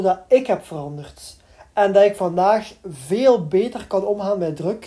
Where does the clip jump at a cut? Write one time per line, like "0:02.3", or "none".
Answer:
none